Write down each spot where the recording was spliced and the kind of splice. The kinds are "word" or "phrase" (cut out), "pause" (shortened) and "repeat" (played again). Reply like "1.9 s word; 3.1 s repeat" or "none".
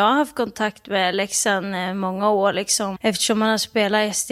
3.0 s word